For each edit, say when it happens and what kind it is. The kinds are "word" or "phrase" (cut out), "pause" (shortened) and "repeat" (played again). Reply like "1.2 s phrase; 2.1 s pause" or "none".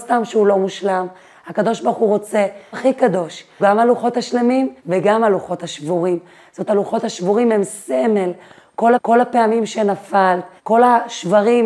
2.7 s word; 3.6 s word; 4.8 s pause; 6.7 s word; 9.0 s repeat; 10.6 s pause

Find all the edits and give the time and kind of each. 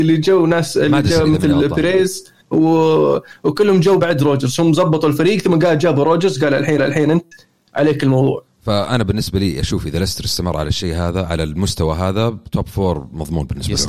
2.4 s pause; 4.0 s word; 6.8 s repeat

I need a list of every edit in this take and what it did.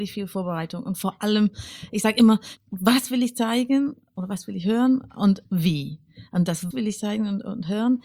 6.7 s word

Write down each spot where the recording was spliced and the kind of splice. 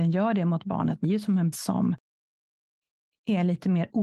1.0 s phrase; 1.5 s phrase

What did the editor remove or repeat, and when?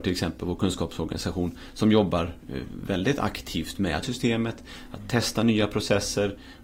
4.0 s word

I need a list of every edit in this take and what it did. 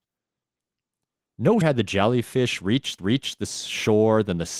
1.6 s word; 3.0 s repeat

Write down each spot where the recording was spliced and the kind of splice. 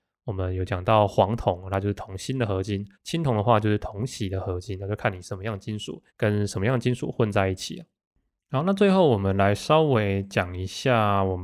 2.9 s pause; 6.1 s pause

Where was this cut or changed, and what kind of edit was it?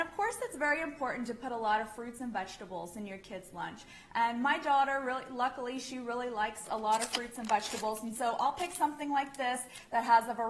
none

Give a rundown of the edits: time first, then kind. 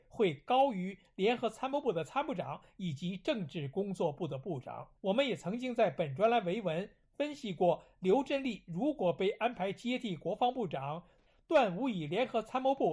5.0 s pause

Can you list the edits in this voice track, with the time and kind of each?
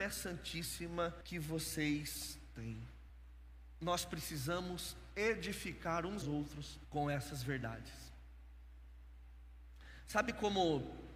1.2 s pause; 3.1 s pause; 6.2 s word; 6.8 s pause

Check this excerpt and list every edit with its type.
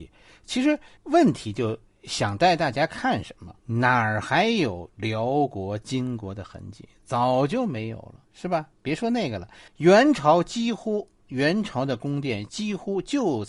1.0 s pause; 3.6 s pause; 8.2 s pause; 9.7 s pause; 11.2 s pause

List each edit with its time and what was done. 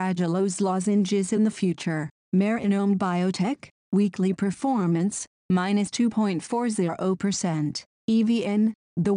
none

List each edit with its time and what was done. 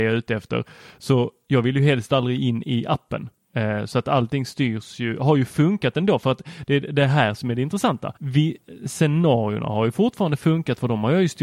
8.2 s pause

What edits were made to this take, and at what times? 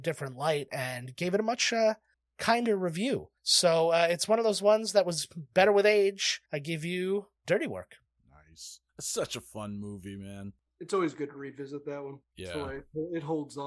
2.1 s pause; 3.4 s pause; 6.5 s pause; 7.4 s pause; 8.9 s pause; 12.2 s pause

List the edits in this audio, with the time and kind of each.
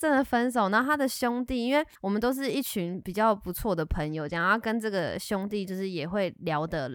2.0 s pause

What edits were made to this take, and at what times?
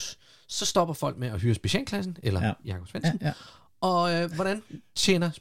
none

